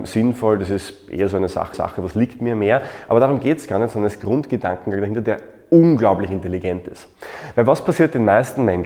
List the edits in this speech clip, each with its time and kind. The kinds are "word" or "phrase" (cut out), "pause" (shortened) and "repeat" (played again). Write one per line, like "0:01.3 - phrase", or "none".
0:01.7 - repeat
0:04.2 - phrase